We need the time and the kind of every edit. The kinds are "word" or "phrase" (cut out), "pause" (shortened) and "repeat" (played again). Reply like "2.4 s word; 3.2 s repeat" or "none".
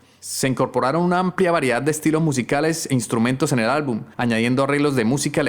4.1 s pause

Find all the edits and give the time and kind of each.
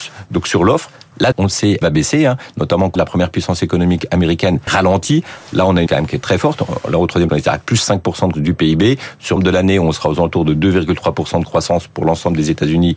1.3 s word; 1.8 s word; 3.0 s word; 4.7 s word; 5.9 s word; 6.2 s word; 7.3 s word; 8.3 s word; 9.4 s word

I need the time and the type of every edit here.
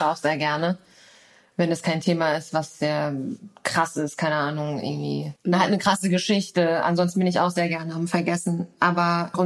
5.4 s pause

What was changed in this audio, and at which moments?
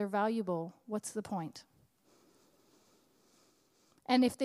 none

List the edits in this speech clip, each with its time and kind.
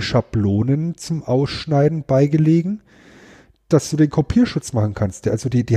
none

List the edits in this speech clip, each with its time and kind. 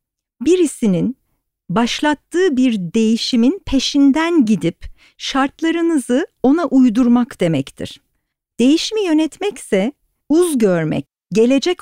none

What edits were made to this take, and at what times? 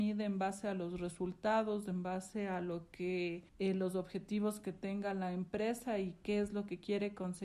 3.5 s pause

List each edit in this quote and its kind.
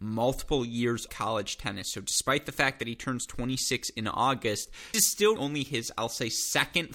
1.1 s word; 4.9 s word; 5.4 s word

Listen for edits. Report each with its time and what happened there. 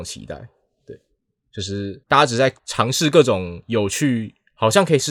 2.0 s pause; 2.6 s pause

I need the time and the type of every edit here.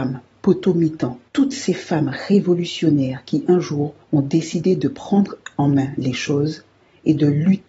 1.3 s pause; 4.0 s pause

